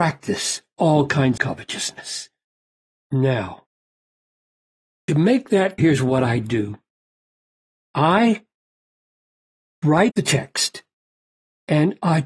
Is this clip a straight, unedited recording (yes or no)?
no